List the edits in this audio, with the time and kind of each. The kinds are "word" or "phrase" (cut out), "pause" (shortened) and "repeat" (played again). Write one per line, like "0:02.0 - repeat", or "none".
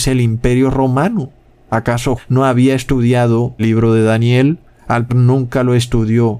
0:02.2 - word
0:03.6 - word
0:05.1 - word